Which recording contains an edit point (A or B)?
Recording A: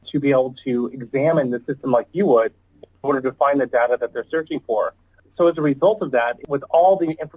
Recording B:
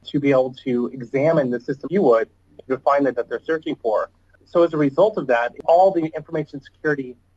B